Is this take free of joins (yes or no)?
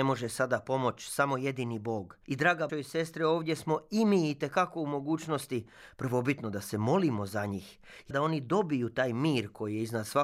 no